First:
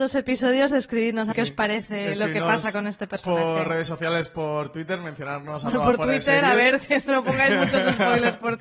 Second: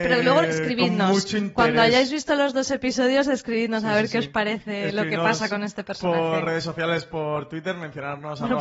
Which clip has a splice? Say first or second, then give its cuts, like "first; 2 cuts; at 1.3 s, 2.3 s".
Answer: first; 1 cut; at 1.3 s